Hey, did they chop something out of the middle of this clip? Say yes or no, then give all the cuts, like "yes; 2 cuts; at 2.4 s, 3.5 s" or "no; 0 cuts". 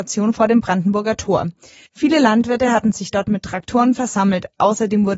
no; 0 cuts